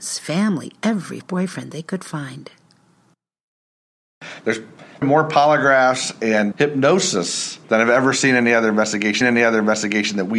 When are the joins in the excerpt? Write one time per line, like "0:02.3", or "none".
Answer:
0:01.2
0:05.0
0:06.5
0:07.6
0:09.2

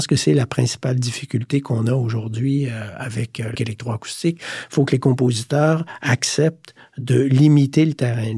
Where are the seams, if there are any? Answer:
0:03.5

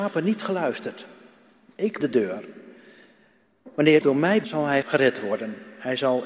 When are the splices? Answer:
0:02.0
0:04.0
0:04.4
0:04.8

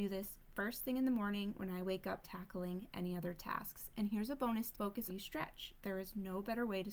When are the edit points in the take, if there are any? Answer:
0:02.2
0:04.7
0:05.1

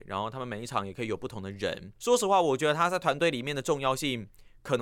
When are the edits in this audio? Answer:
0:02.0

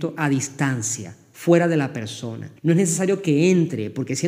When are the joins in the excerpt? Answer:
0:02.6

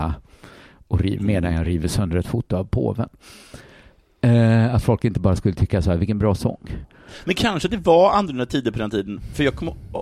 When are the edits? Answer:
none

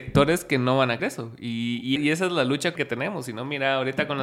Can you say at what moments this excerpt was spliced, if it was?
0:01.0
0:02.0
0:02.8

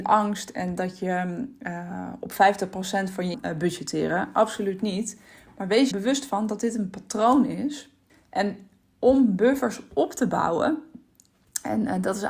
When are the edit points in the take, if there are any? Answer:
0:03.3
0:05.9
0:08.1

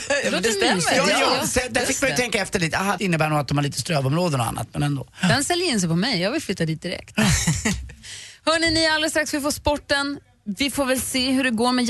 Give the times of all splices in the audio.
0:03.0

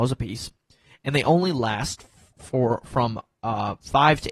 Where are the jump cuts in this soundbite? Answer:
none

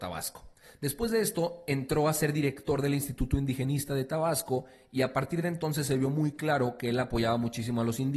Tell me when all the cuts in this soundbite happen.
none

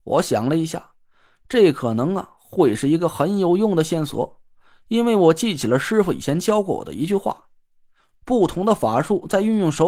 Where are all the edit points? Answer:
none

